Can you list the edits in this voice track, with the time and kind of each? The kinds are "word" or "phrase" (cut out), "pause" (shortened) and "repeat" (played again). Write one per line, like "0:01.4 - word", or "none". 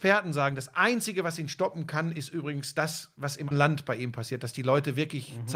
0:03.5 - word